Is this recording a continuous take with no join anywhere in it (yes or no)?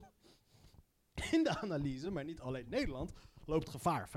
yes